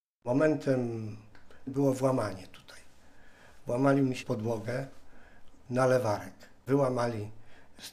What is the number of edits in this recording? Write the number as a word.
two